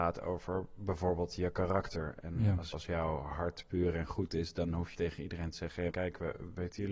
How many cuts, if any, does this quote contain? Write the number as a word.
three